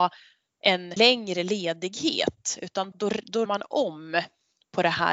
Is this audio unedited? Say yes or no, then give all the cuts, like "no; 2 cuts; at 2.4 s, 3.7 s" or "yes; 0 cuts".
no; 3 cuts; at 1.0 s, 2.9 s, 3.5 s